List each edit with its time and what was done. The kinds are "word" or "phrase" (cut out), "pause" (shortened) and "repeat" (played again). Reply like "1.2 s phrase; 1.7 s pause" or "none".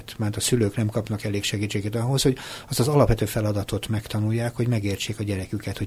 none